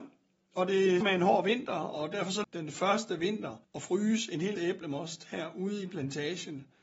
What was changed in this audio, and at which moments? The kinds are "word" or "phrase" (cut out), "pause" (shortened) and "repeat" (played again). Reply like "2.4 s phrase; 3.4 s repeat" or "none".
1.0 s word; 2.4 s phrase; 3.6 s pause; 4.6 s word